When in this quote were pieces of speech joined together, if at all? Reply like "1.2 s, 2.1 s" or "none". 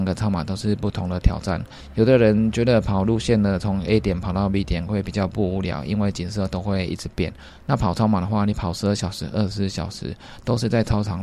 none